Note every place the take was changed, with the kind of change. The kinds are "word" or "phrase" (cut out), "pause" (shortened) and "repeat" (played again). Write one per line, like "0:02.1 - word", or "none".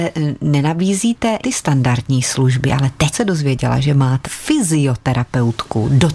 0:01.4 - word
0:03.1 - word
0:04.2 - word

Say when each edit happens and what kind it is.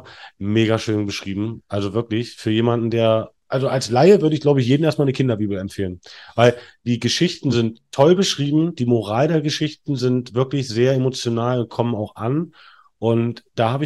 0:03.4 - pause

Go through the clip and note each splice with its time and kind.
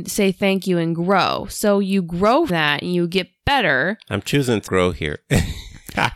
0:02.5 - word
0:04.7 - word

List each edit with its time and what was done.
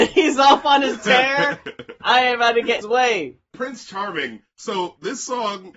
0:02.8 - word

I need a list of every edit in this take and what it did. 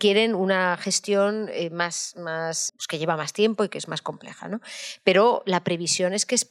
0:02.7 - word

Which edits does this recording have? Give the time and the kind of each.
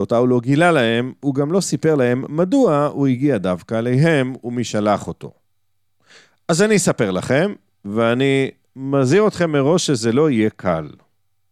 none

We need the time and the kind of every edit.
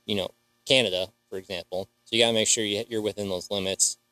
0:02.0 - pause

